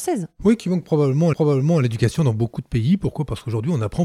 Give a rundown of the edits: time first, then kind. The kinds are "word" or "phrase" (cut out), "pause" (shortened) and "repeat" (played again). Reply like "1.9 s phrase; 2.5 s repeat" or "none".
1.3 s repeat

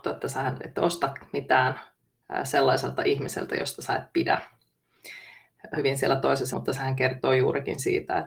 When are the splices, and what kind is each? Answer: 5.8 s word; 6.5 s word

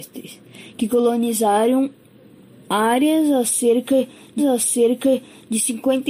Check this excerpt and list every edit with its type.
4.4 s repeat

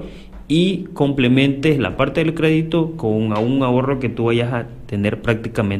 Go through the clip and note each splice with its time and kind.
none

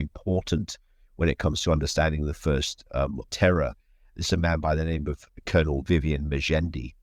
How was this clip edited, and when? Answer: 3.3 s phrase

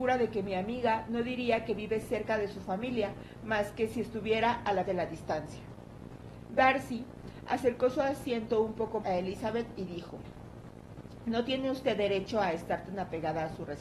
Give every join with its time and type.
4.8 s word; 9.0 s word

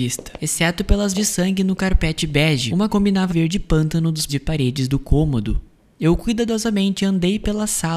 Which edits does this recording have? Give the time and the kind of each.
1.1 s word; 2.9 s phrase; 3.3 s phrase; 4.3 s word

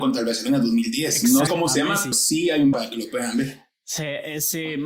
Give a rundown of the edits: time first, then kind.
1.5 s word; 2.1 s word; 2.7 s word

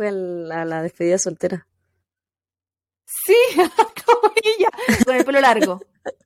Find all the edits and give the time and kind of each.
5.1 s word

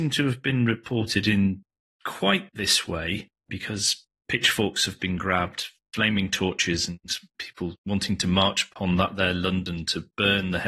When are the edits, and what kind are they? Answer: 7.8 s pause

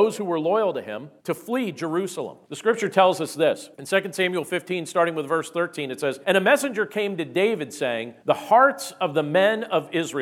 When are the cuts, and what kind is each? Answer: 1.2 s pause; 2.4 s pause; 3.7 s pause; 6.2 s pause; 8.2 s pause

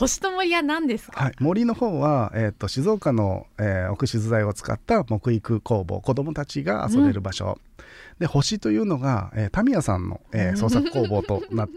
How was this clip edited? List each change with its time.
10.3 s pause

